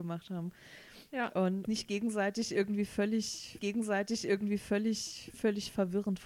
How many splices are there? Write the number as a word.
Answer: two